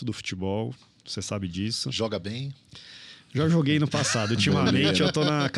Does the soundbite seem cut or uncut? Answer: uncut